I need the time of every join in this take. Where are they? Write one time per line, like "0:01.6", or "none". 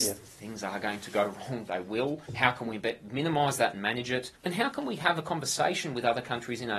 0:02.3
0:04.4